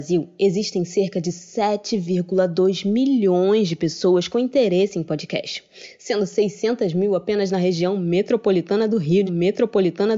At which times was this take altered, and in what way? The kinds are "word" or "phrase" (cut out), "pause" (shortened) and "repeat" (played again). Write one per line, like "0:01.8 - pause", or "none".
0:09.3 - repeat